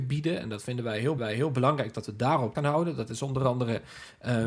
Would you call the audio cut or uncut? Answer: cut